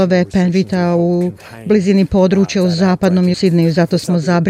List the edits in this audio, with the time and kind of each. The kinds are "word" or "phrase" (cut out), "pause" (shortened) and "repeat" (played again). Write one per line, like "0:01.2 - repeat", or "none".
0:03.3 - word